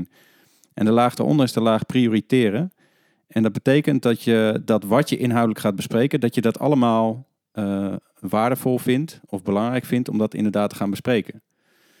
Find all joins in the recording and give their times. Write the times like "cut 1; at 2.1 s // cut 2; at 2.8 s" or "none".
none

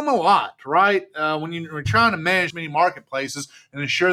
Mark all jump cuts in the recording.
cut 1; at 2.5 s

